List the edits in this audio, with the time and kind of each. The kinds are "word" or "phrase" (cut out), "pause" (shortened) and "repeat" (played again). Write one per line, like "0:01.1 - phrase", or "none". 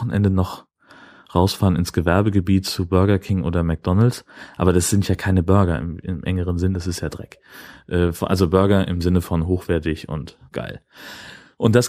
0:10.5 - pause